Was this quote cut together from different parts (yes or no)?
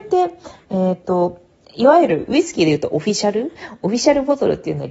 no